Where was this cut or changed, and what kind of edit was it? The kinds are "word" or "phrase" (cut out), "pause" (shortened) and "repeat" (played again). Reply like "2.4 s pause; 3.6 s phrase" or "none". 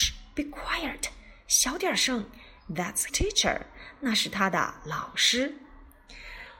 3.1 s word